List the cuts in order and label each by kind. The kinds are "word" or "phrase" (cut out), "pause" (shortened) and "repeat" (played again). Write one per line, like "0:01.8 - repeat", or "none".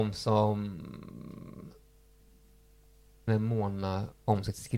0:03.3 - word